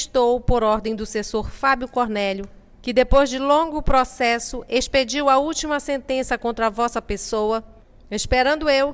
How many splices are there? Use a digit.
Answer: 0